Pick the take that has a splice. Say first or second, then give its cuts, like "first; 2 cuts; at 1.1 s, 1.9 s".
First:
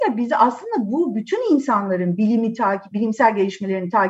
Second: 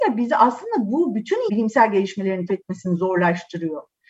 second; 2 cuts; at 1.5 s, 2.5 s